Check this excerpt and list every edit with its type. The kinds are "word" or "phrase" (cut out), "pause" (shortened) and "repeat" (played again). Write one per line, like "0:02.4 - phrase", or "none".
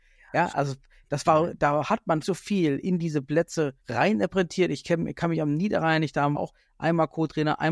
0:02.2 - word
0:03.8 - pause
0:06.3 - phrase